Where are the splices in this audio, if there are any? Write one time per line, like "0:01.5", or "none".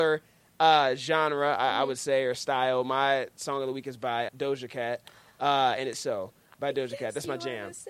0:02.3
0:04.3
0:05.9